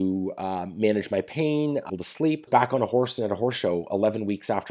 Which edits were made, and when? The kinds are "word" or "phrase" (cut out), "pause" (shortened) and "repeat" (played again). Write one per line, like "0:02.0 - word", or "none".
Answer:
0:01.9 - phrase
0:02.5 - phrase